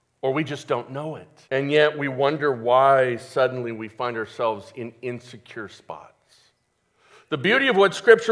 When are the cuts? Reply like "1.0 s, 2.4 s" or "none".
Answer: 1.4 s